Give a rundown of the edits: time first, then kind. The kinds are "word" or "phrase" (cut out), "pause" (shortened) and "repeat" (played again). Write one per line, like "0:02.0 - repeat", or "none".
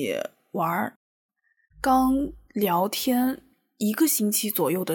none